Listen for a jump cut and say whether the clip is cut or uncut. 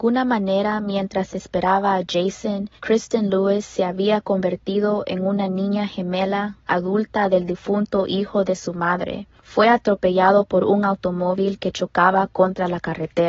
cut